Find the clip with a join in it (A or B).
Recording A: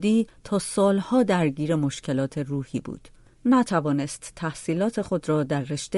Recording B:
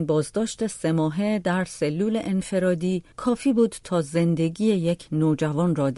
B